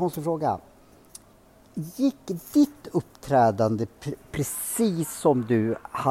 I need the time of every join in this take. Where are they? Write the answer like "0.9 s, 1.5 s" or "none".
none